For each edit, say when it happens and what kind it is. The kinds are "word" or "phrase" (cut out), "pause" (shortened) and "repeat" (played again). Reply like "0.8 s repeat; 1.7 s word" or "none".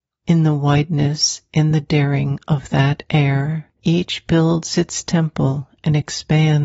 3.7 s pause